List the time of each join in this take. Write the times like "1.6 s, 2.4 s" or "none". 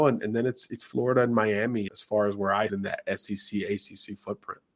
1.9 s, 2.7 s